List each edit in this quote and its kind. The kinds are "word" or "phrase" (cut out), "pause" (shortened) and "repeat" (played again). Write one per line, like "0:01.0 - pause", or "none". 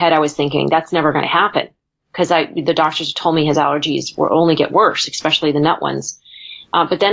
none